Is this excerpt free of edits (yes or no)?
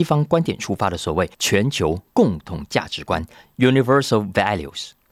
no